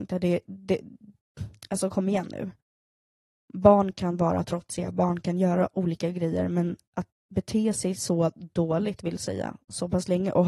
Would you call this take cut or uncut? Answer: uncut